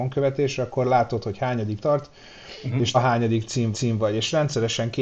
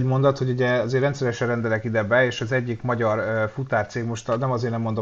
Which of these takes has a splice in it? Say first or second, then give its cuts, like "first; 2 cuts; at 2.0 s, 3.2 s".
first; 3 cuts; at 1.8 s, 2.9 s, 3.7 s